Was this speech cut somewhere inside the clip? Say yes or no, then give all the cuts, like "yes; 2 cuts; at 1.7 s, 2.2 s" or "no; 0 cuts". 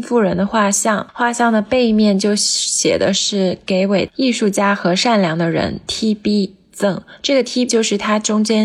yes; 1 cut; at 7.7 s